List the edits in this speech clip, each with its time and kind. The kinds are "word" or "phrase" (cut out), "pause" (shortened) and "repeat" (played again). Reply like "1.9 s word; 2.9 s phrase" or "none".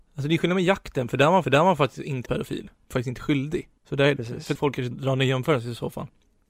1.4 s repeat; 2.3 s word; 2.9 s phrase; 3.8 s pause; 4.2 s phrase; 4.5 s word; 4.9 s word